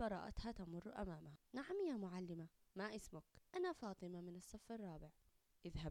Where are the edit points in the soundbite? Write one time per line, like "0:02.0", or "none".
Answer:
0:01.4
0:02.7
0:03.5